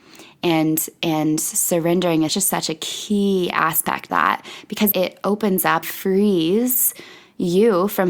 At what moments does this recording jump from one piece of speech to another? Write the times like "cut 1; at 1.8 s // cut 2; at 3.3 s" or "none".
cut 1; at 2.3 s // cut 2; at 4.1 s // cut 3; at 4.9 s // cut 4; at 5.8 s